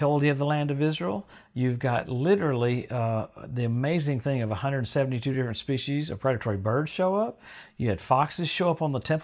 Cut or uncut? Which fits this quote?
uncut